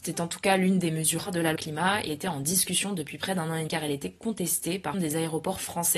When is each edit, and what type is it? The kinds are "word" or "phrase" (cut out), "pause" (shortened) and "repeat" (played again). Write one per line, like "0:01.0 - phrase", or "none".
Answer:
0:01.3 - word
0:01.6 - word
0:02.1 - word
0:03.7 - word
0:04.9 - word